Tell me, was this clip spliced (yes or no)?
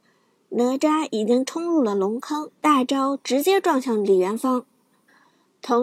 yes